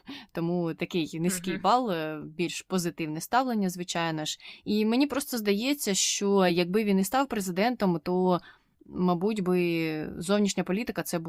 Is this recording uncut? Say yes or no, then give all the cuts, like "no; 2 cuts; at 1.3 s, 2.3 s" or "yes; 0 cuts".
yes; 0 cuts